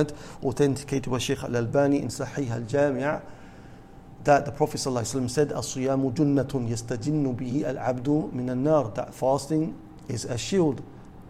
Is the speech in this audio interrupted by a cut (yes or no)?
no